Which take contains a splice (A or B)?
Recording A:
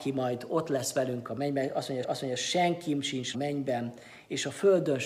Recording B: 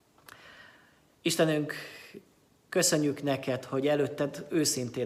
A